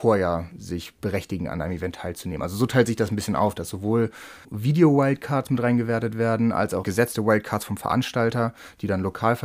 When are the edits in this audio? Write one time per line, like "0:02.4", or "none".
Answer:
0:04.4
0:06.8